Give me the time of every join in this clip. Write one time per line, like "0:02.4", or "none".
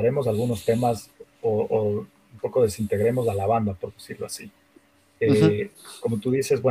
none